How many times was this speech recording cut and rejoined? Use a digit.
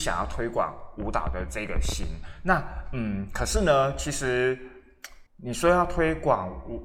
1